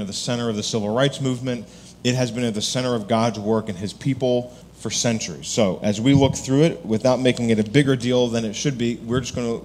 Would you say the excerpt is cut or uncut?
cut